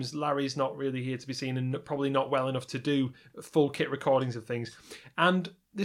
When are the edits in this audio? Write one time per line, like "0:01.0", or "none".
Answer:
none